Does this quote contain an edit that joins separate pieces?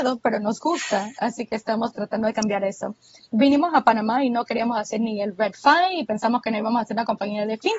no; 0 cuts

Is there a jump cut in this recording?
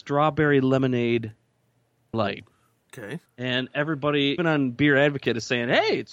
yes; 3 cuts; at 2.1 s, 3.3 s, 4.4 s

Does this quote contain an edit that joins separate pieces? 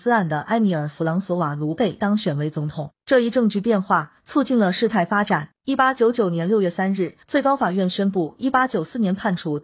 yes; 3 cuts; at 3.0 s, 5.6 s, 7.2 s

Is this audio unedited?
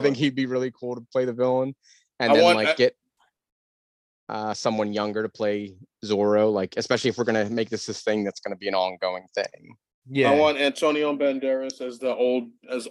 yes; 0 cuts

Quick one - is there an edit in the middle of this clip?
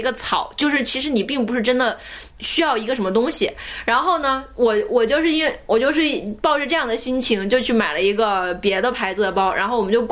yes; 1 cut; at 2.3 s

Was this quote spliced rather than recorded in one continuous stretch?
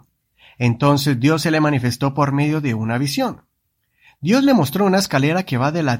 no; 0 cuts

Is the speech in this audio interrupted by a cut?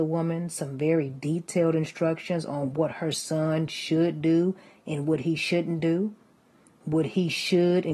no; 0 cuts

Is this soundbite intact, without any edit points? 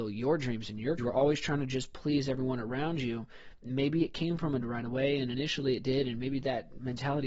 no; 2 cuts; at 1.0 s, 4.6 s

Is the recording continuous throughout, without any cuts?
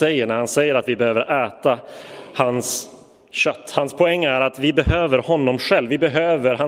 yes; 0 cuts

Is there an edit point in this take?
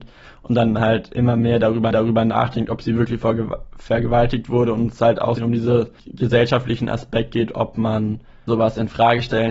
yes; 4 cuts; at 1.9 s, 5.4 s, 6.0 s, 8.5 s

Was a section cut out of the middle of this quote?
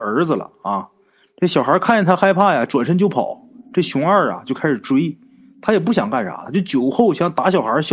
no; 0 cuts

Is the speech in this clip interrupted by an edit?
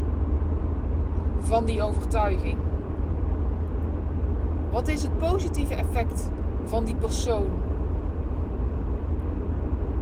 no; 0 cuts

